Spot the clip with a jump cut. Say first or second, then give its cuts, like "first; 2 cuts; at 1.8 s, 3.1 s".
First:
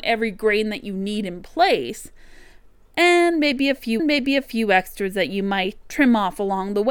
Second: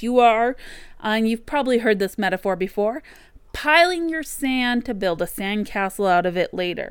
first; 2 cuts; at 4.0 s, 5.8 s